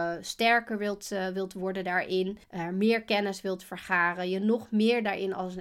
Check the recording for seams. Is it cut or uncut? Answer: cut